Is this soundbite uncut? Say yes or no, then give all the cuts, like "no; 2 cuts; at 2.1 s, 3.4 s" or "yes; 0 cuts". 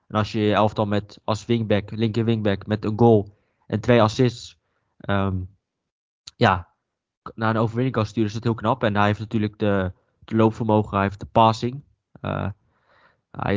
yes; 0 cuts